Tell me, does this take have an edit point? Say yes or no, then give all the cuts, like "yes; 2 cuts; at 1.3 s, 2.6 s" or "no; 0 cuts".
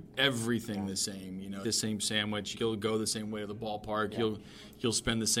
yes; 2 cuts; at 1.6 s, 2.5 s